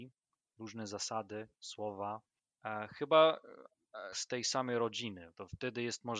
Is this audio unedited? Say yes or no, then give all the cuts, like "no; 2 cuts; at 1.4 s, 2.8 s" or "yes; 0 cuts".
no; 2 cuts; at 1.5 s, 4.1 s